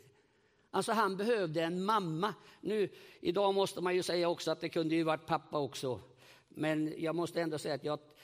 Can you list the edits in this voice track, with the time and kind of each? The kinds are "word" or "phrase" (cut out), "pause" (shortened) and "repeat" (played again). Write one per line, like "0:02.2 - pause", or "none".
none